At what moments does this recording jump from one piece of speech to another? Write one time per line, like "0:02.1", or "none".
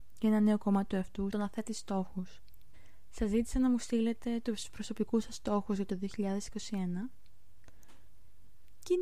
0:01.3